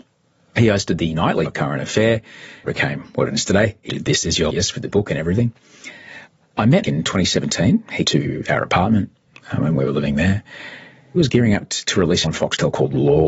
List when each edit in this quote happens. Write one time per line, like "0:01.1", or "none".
0:01.4
0:02.6
0:03.9
0:04.5
0:04.9
0:06.8
0:08.0
0:11.2
0:12.2